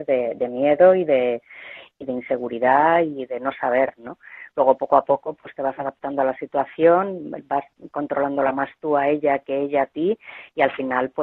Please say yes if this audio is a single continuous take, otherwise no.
yes